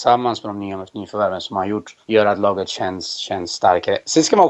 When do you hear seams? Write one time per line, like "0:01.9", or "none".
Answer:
0:02.0